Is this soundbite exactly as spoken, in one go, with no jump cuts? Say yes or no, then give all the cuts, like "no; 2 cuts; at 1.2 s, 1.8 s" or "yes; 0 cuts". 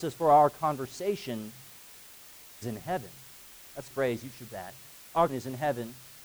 no; 4 cuts; at 2.6 s, 3.9 s, 4.5 s, 5.3 s